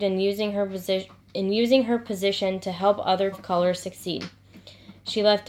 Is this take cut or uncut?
cut